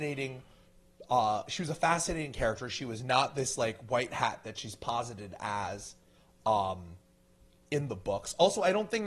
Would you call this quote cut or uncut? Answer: uncut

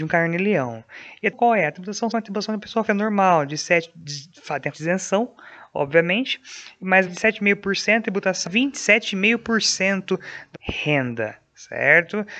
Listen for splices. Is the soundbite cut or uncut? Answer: cut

